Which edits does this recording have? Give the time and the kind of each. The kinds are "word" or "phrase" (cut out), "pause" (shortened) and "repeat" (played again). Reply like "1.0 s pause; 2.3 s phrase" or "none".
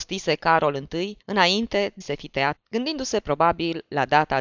1.2 s pause; 2.0 s word; 2.6 s word